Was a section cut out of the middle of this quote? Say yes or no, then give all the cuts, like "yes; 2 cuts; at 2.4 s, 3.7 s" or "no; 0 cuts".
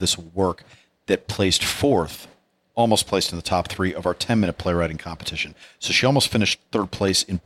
no; 0 cuts